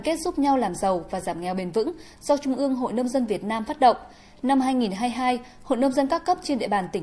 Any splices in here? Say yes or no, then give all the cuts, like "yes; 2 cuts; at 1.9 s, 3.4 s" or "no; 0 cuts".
no; 0 cuts